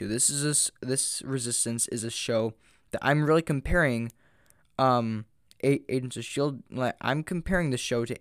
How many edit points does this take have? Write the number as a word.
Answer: one